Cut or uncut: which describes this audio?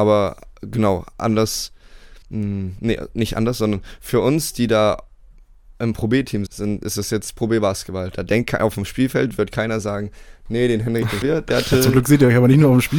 cut